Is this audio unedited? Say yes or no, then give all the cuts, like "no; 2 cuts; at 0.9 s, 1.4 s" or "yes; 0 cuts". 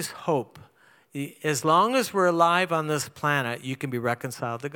yes; 0 cuts